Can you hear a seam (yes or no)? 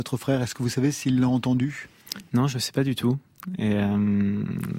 no